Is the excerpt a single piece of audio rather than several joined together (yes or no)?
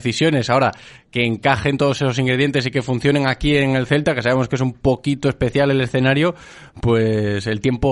yes